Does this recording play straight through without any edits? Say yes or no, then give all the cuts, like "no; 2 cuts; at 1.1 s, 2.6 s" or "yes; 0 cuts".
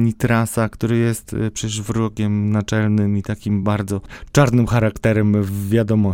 yes; 0 cuts